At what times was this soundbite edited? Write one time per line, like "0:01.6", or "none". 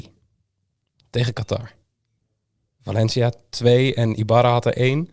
none